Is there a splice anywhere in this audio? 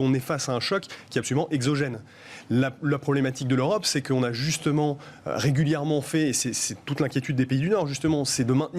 no; 0 cuts

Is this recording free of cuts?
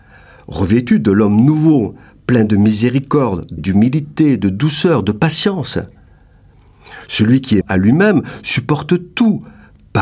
no; 2 cuts; at 3.6 s, 7.6 s

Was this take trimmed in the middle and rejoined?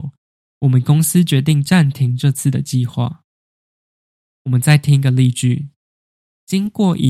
no; 0 cuts

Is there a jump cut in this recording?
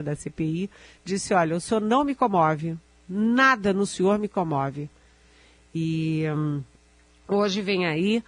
no; 0 cuts

